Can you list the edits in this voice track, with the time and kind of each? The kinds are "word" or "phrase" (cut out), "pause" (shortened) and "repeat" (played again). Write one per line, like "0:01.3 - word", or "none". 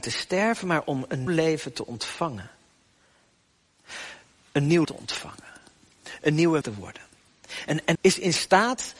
0:01.3 - word
0:04.8 - word
0:06.6 - word
0:07.9 - word